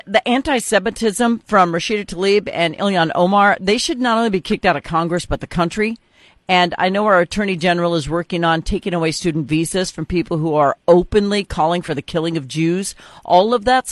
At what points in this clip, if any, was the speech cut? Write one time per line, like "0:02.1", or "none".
none